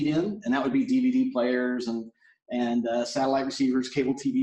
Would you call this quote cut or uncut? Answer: uncut